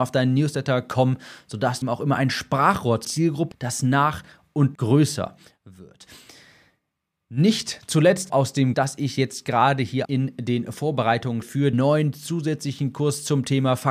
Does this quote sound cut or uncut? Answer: cut